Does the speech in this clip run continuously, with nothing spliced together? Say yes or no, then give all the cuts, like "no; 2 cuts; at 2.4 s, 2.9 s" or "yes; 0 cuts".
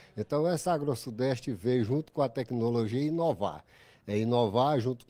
yes; 0 cuts